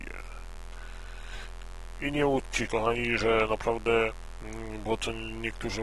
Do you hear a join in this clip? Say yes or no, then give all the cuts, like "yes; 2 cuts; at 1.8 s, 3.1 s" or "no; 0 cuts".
yes; 1 cut; at 2.7 s